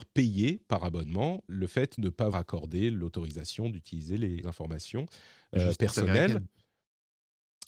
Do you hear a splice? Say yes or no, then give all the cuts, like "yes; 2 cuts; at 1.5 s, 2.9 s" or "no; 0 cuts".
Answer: yes; 4 cuts; at 1.5 s, 2.0 s, 2.3 s, 4.4 s